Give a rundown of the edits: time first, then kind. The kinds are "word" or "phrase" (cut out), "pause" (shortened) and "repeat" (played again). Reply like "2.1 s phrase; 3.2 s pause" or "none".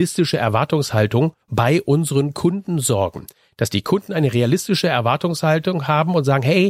1.4 s pause